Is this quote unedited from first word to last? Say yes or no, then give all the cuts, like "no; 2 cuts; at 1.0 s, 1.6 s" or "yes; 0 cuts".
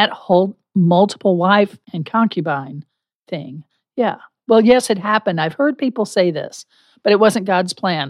no; 2 cuts; at 1.8 s, 3.7 s